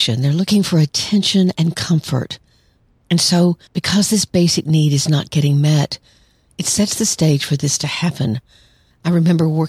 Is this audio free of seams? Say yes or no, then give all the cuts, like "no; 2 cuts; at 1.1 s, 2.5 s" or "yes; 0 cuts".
no; 1 cut; at 3.7 s